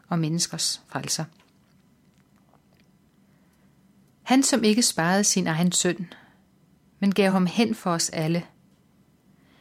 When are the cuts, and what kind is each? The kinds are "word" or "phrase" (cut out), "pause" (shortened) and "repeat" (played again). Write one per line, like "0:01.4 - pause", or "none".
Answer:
none